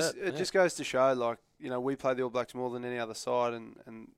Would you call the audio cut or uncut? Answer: uncut